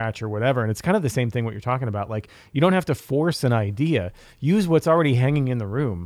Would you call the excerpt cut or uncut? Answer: uncut